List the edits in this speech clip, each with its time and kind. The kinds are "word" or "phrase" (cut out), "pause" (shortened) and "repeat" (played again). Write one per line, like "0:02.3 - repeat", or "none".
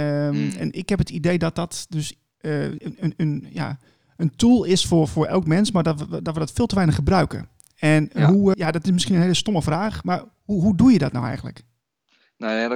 0:02.8 - word
0:08.5 - word